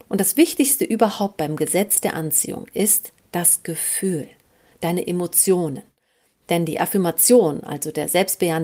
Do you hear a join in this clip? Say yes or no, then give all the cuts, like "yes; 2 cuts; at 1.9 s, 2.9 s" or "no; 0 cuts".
no; 0 cuts